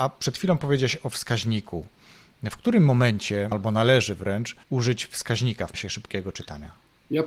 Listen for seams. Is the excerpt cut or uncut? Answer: cut